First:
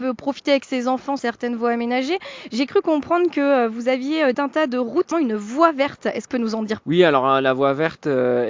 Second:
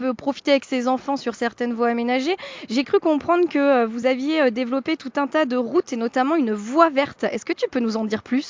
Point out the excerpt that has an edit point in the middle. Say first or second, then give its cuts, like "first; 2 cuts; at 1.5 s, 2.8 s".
first; 5 cuts; at 1.2 s, 4.3 s, 5.1 s, 6.3 s, 6.8 s